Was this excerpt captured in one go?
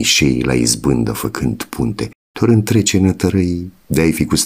yes; 0 cuts

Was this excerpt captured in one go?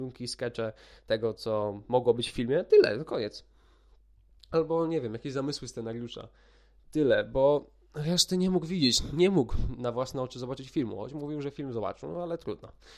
yes; 0 cuts

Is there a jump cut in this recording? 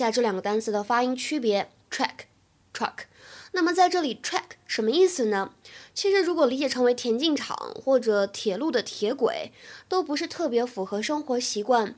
yes; 1 cut; at 1.8 s

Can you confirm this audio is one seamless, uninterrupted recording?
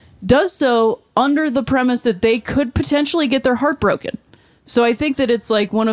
yes; 0 cuts

